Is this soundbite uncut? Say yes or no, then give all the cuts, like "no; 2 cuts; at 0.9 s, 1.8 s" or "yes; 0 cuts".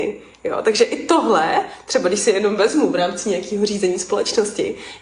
yes; 0 cuts